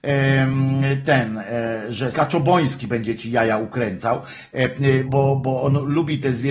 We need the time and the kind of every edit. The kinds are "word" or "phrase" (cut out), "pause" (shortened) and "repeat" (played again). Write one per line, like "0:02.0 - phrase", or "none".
0:02.1 - word
0:05.1 - word